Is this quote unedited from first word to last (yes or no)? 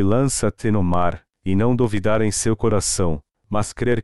yes